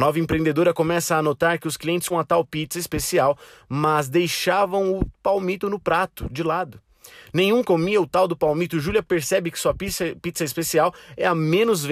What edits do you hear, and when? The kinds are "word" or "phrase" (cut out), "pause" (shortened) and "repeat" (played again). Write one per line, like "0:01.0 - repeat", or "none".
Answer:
0:02.1 - word
0:07.6 - word